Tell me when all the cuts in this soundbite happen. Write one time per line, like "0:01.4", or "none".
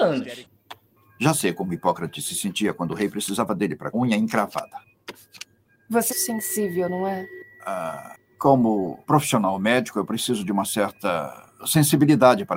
0:03.9
0:06.1
0:09.0

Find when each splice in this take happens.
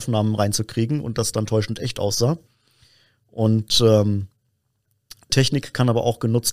0:05.3

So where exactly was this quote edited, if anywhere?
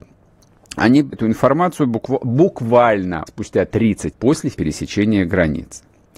0:01.1
0:03.3
0:04.1
0:04.5

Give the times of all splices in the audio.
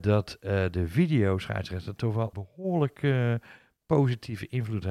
0:02.3

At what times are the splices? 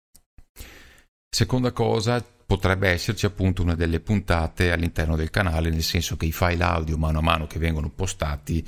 0:03.8

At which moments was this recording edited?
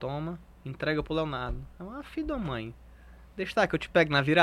none

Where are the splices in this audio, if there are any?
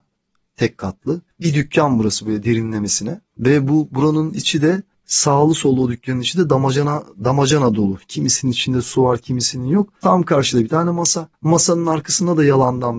0:03.3
0:10.0
0:11.3

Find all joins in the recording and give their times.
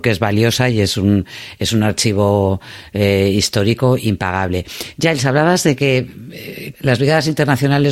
0:06.7

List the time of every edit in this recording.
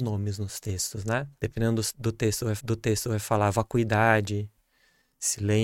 0:01.4
0:02.6

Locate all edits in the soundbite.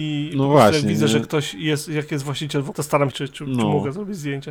0:02.7
0:03.1

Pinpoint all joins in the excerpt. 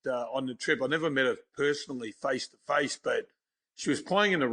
none

